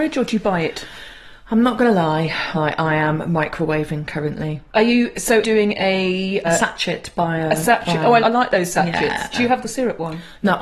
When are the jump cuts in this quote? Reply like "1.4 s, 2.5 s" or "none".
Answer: 2.5 s, 4.7 s, 5.4 s, 6.4 s, 8.2 s, 9.6 s